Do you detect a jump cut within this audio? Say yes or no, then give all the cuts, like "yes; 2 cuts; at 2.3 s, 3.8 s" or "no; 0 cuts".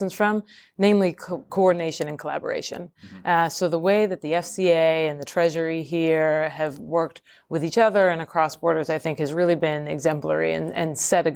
no; 0 cuts